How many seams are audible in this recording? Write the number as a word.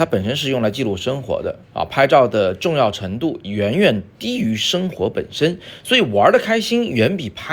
one